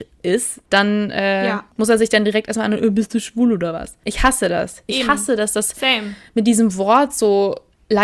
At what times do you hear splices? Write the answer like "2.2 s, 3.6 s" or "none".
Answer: 1.7 s